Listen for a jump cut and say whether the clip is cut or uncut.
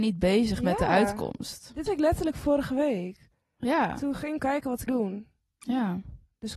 cut